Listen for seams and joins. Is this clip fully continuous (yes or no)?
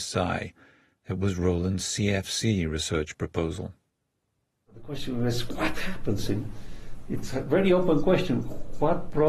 yes